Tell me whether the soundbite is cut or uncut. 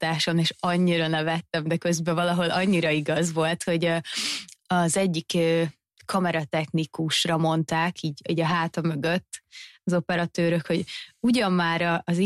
uncut